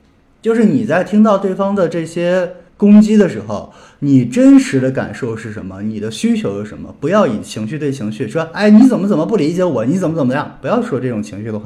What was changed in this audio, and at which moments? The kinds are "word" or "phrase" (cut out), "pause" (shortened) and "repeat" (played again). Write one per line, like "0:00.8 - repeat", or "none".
0:02.7 - pause